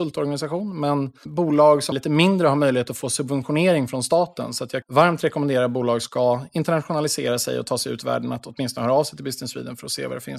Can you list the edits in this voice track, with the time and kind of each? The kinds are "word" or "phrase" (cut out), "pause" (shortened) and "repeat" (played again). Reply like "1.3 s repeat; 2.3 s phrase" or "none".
1.9 s word; 4.8 s word; 6.0 s word